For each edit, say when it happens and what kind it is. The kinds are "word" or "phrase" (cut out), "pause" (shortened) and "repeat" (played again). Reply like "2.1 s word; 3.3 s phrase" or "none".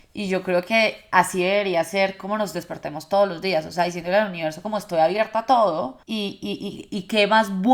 6.0 s pause